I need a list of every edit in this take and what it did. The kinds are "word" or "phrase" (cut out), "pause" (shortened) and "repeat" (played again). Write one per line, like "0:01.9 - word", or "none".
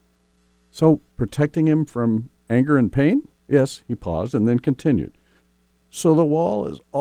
0:01.1 - pause
0:03.4 - pause